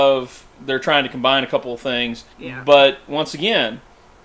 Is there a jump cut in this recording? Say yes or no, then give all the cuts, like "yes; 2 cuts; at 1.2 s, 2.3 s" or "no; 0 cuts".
yes; 1 cut; at 2.3 s